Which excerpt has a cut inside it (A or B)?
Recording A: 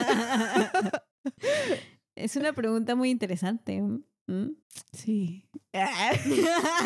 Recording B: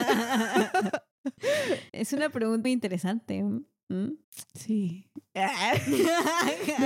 B